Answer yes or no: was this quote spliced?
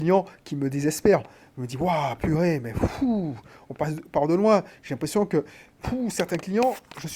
no